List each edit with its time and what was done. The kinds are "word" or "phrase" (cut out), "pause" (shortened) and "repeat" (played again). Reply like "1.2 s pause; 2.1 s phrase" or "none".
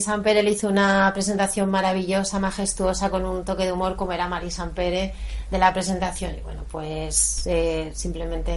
none